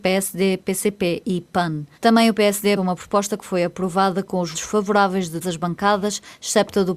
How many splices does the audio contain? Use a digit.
4